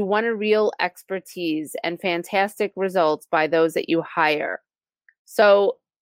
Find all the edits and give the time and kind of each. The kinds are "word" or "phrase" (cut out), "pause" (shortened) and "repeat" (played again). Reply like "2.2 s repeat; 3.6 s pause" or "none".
none

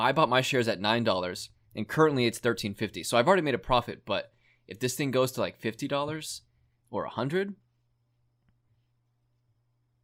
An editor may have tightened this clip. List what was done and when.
none

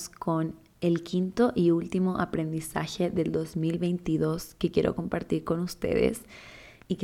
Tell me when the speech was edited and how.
none

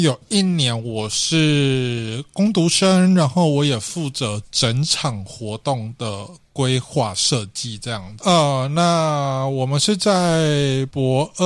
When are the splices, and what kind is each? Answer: 8.2 s word

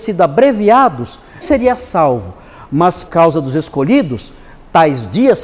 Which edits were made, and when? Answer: 1.4 s word; 3.1 s word

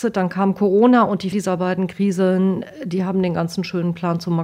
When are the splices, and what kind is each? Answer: 1.3 s word

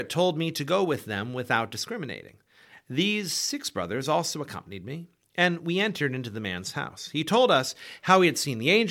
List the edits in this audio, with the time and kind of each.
none

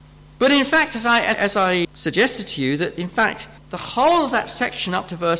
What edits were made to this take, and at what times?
1.3 s word; 1.8 s word; 3.6 s pause

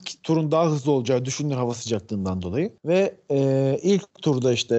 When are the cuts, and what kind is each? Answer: 2.8 s pause

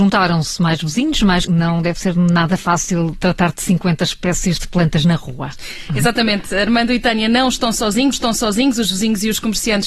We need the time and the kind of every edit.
1.4 s phrase; 8.1 s repeat

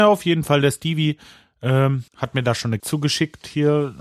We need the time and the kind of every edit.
2.1 s pause; 2.8 s word

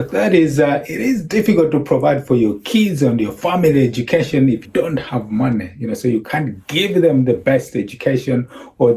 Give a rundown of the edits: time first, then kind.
4.6 s word

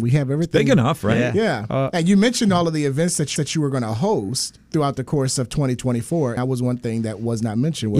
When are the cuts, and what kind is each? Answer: 3.4 s repeat; 4.6 s pause; 6.4 s word

